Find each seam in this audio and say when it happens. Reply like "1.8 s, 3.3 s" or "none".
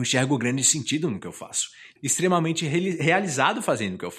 2.0 s